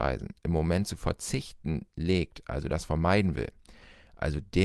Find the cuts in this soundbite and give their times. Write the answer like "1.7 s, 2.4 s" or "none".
none